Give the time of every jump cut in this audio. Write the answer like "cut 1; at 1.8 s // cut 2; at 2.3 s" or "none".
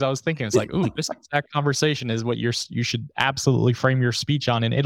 none